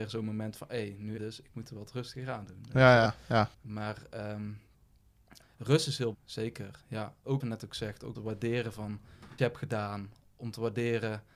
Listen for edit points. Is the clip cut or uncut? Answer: cut